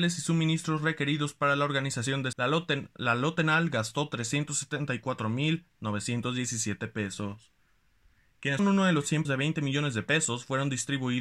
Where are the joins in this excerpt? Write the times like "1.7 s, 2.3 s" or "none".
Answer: 2.3 s, 8.6 s, 9.2 s